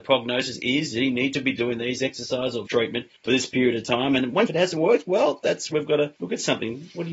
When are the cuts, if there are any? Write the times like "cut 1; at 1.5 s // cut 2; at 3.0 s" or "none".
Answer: cut 1; at 2.7 s // cut 2; at 3.1 s // cut 3; at 4.5 s // cut 4; at 5.7 s // cut 5; at 6.2 s